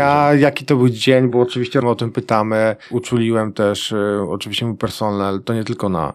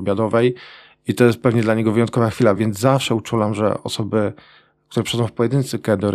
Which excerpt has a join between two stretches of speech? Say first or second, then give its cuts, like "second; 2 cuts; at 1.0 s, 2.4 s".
first; 2 cuts; at 1.3 s, 1.8 s